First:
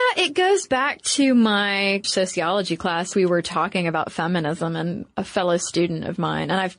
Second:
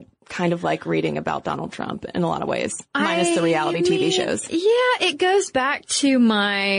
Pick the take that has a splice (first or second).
first